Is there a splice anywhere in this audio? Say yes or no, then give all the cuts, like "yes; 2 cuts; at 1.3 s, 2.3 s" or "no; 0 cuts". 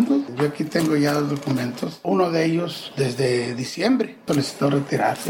no; 0 cuts